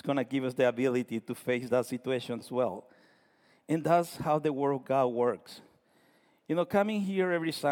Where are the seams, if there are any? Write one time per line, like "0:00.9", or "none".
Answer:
0:02.4